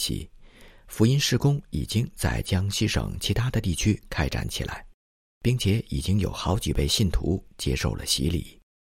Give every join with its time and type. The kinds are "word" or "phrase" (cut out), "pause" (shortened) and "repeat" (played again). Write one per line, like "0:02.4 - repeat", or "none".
none